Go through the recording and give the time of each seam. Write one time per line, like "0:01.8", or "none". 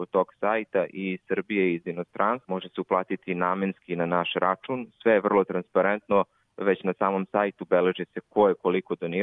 none